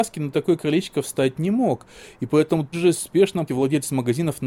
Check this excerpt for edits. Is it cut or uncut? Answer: cut